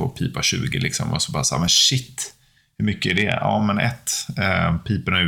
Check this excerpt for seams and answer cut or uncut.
uncut